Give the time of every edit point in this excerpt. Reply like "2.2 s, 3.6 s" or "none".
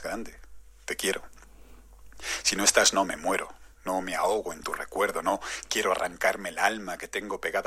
none